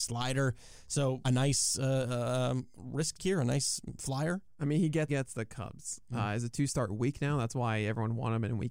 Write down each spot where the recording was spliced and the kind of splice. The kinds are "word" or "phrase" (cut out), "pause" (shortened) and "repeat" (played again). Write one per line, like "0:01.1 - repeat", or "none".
0:01.2 - phrase
0:03.2 - phrase
0:05.1 - phrase